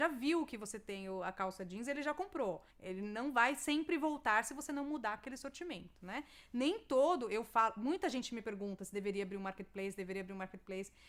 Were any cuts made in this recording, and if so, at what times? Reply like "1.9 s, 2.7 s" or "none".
2.7 s

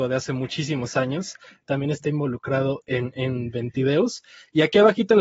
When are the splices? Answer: none

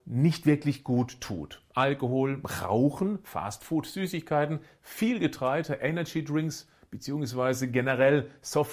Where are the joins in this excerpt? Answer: none

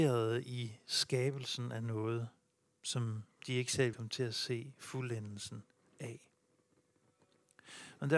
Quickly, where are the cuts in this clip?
3.9 s

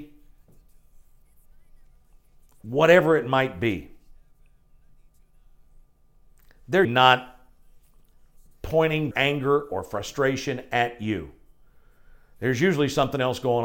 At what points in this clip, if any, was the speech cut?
6.8 s, 9.1 s

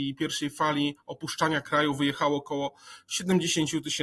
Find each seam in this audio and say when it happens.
none

